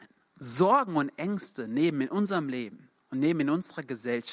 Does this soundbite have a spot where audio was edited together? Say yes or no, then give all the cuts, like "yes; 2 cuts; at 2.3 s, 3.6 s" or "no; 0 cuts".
no; 0 cuts